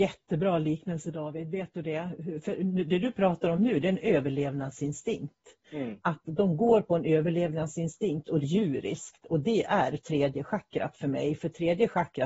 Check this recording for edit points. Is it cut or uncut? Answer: cut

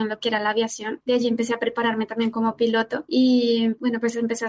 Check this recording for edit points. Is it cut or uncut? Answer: uncut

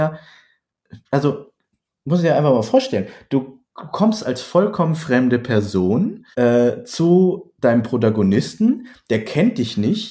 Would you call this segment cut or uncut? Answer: cut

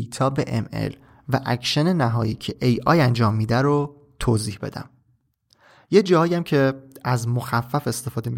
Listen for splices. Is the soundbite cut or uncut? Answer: uncut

